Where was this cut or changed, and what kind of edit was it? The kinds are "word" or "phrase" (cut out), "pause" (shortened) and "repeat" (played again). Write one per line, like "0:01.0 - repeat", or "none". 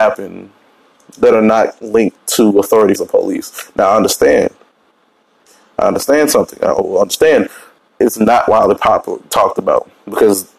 0:03.0 - word